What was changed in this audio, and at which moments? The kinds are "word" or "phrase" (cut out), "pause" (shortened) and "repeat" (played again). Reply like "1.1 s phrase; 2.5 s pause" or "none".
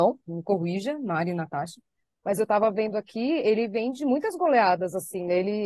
none